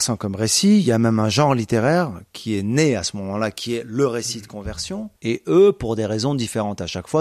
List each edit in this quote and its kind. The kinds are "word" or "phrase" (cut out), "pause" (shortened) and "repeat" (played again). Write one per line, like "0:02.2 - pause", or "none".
0:05.2 - pause